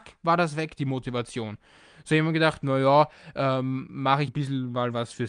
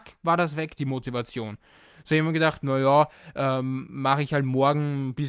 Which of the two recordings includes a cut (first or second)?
first